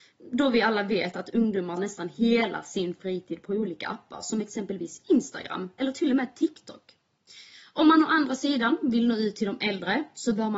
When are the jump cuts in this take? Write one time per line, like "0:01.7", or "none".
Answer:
0:01.8